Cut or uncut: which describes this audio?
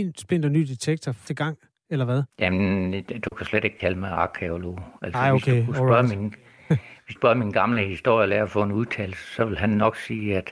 cut